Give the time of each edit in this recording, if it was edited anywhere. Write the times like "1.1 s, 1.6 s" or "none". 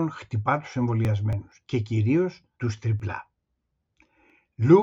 2.5 s